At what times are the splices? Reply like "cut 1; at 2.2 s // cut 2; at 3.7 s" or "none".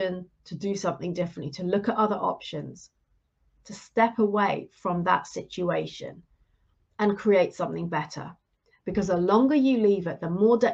none